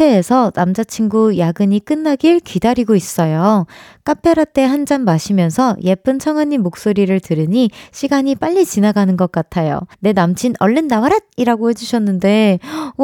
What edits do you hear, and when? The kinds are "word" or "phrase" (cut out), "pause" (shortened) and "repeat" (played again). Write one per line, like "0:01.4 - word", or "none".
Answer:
0:09.9 - pause